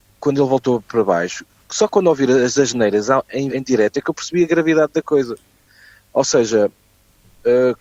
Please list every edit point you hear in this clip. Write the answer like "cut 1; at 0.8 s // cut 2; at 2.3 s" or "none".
cut 1; at 3.5 s